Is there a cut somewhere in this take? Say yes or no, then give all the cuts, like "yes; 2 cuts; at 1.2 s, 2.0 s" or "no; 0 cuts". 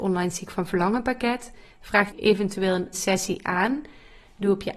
yes; 2 cuts; at 2.1 s, 2.9 s